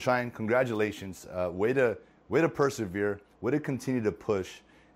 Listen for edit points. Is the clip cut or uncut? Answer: uncut